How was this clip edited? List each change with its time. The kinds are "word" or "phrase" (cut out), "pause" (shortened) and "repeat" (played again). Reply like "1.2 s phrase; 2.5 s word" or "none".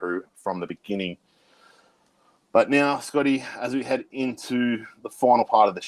none